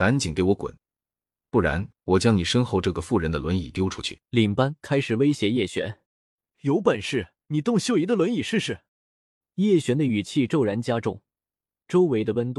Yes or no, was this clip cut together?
yes